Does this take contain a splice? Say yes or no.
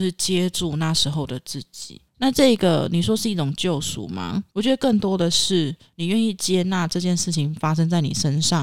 yes